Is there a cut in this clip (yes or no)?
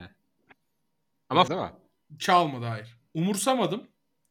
yes